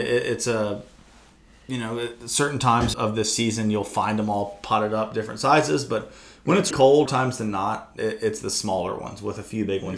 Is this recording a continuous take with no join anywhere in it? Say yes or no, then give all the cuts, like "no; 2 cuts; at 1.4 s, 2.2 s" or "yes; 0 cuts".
no; 3 cuts; at 2.9 s, 6.7 s, 7.1 s